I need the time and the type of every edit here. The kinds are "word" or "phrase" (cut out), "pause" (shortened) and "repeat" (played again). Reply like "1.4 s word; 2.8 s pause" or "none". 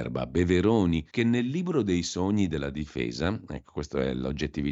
1.1 s pause